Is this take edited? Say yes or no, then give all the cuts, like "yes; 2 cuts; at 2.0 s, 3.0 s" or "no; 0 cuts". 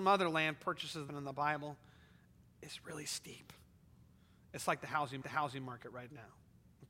yes; 2 cuts; at 1.1 s, 5.2 s